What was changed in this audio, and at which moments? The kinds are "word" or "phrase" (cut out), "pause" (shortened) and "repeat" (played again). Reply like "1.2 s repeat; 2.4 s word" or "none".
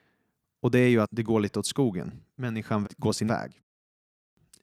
1.0 s word; 2.8 s word; 3.3 s word